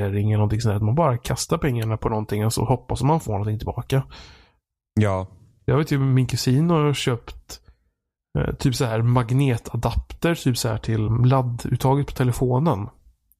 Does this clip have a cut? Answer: yes; 2 cuts; at 3.2 s, 11.1 s

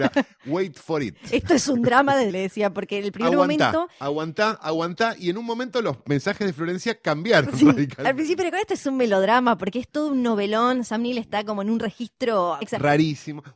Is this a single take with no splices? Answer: no; 2 cuts; at 2.3 s, 12.6 s

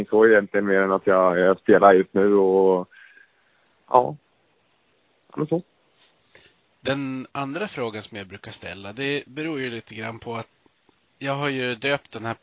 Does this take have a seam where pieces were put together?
no; 0 cuts

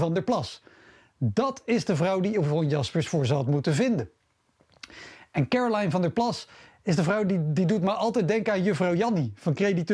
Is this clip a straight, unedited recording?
yes; 0 cuts

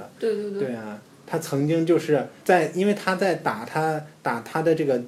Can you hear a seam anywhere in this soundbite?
yes; 1 cut; at 2.4 s

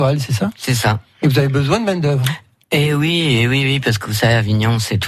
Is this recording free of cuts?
yes; 0 cuts

